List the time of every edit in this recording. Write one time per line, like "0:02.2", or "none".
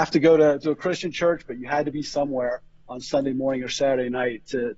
none